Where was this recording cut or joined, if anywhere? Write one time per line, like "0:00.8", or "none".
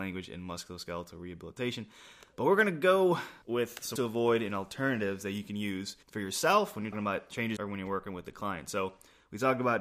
0:03.4
0:04.0
0:06.0
0:06.9
0:07.6